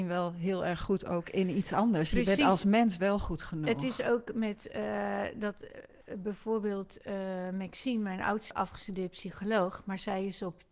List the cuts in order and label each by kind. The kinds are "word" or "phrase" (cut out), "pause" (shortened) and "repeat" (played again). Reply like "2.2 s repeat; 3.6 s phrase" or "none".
8.5 s phrase